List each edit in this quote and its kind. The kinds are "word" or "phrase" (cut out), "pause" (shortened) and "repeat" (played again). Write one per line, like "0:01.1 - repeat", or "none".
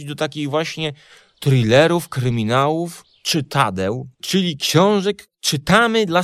0:04.1 - pause
0:05.3 - word

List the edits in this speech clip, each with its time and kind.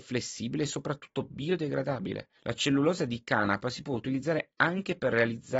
0:02.4 - pause

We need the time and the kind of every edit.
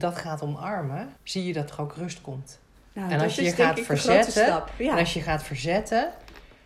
0:01.2 - pause

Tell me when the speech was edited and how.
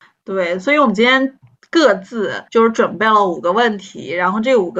0:02.5 - pause

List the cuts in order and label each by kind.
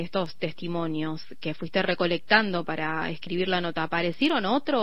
none

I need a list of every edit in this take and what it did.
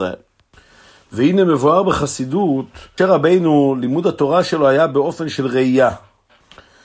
0:03.0 - word

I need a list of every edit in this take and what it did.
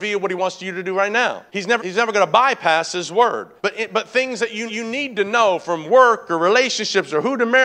0:01.5 - pause
0:01.8 - word
0:03.6 - pause
0:04.7 - repeat

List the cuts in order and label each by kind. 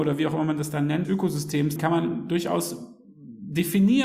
0:01.0 - word
0:01.8 - phrase

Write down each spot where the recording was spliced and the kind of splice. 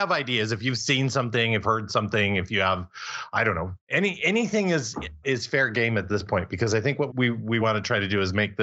0:01.6 - word
0:05.2 - word
0:07.1 - word
0:07.6 - word

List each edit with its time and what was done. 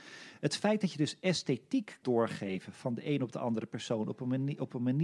0:02.0 - word

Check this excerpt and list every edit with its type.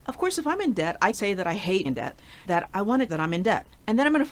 0:01.1 - word
0:01.8 - word
0:02.4 - word
0:03.1 - word

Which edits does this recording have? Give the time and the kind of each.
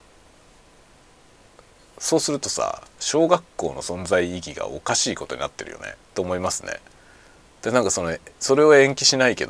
0:06.0 - pause

